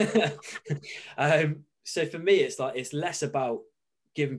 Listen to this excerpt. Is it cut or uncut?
uncut